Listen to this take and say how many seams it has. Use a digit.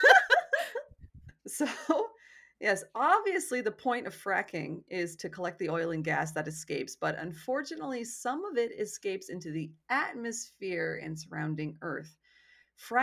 1